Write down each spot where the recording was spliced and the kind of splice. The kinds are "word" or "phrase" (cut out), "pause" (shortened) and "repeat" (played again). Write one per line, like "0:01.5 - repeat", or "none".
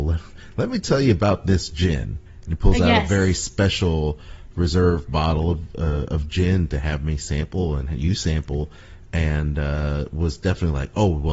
none